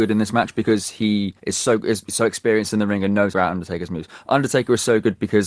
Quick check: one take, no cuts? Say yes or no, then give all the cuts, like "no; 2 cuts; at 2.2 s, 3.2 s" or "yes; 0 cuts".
no; 2 cuts; at 1.4 s, 3.3 s